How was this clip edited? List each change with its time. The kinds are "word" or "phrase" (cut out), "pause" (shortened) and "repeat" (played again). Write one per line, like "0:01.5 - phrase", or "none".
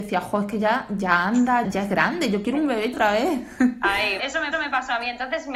0:01.6 - word
0:02.9 - word
0:04.2 - word
0:04.5 - repeat